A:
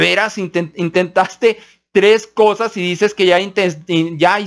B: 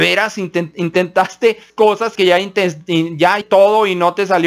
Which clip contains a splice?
B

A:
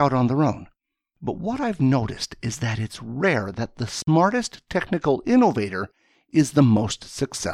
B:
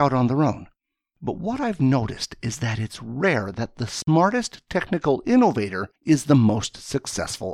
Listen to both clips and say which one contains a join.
B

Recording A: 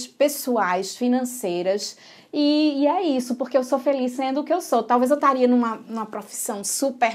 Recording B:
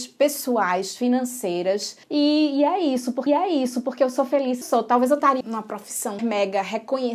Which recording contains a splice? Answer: B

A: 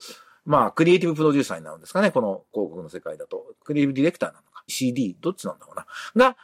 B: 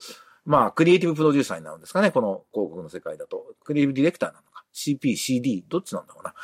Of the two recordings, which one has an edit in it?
A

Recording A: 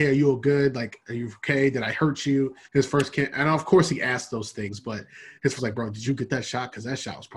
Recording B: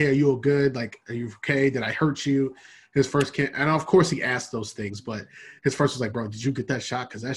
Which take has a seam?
A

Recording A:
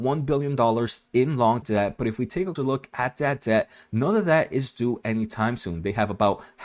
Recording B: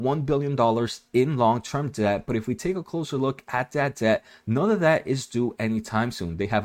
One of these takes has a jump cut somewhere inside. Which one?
A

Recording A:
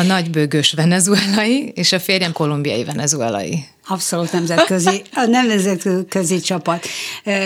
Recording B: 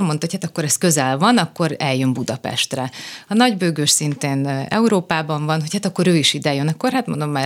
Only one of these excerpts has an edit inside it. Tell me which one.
A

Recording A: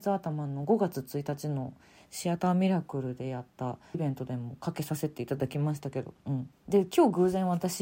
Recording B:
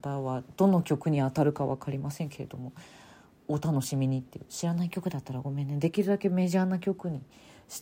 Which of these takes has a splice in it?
A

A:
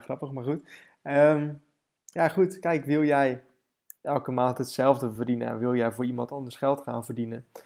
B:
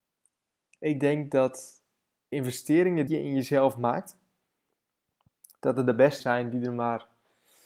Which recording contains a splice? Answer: B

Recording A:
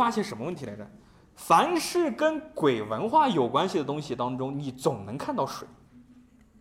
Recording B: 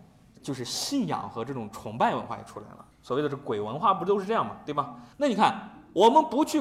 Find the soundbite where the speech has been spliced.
B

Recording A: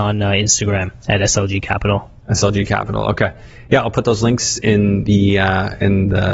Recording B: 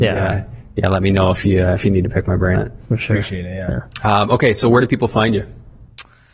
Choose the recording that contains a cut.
B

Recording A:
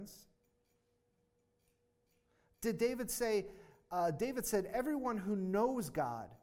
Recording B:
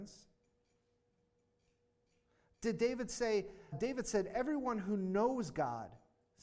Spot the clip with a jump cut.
B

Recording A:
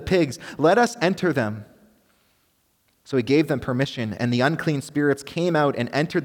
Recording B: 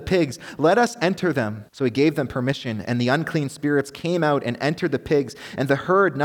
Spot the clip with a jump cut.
B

